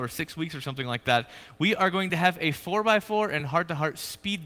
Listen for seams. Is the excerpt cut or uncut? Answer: uncut